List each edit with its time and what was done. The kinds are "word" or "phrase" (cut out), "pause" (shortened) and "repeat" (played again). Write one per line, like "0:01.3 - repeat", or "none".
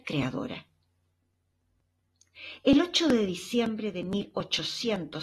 none